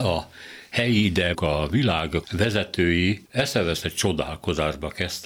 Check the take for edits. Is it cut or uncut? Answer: cut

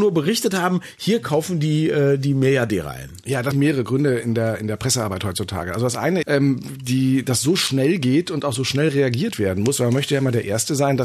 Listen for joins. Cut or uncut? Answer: cut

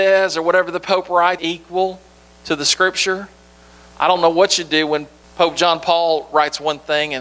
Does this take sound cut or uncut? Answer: cut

